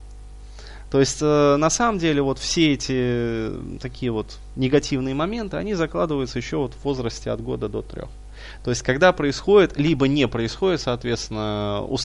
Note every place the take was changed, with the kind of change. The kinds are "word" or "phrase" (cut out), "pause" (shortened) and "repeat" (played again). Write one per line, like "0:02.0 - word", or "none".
none